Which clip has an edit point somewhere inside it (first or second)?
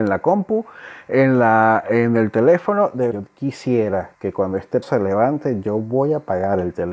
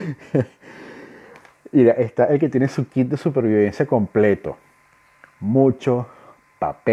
first